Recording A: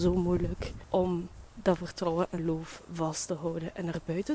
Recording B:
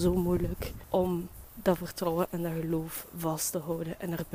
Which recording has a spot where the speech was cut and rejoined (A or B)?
A